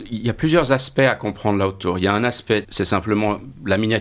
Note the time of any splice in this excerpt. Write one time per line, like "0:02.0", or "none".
0:02.6